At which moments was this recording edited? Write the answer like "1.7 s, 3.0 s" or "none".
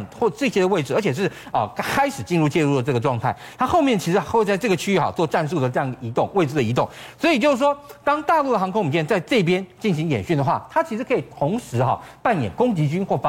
none

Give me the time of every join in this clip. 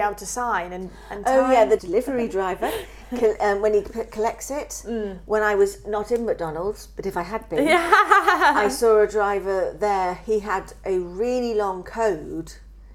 none

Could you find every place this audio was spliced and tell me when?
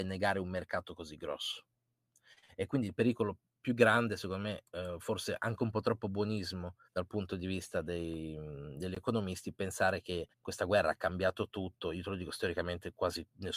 6.8 s, 10.3 s

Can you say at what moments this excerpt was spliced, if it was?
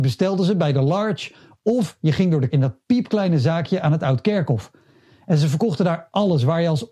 2.5 s

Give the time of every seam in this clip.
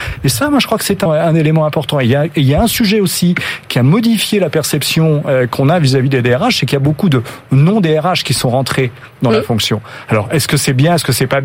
1.1 s

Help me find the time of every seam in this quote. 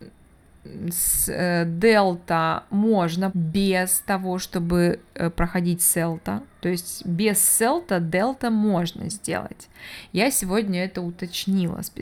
3.3 s

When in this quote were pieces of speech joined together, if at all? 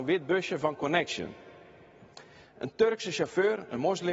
none

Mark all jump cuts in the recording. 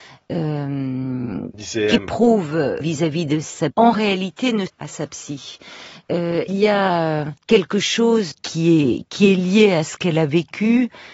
2.8 s, 3.7 s, 4.7 s, 6.5 s, 7.4 s, 8.3 s

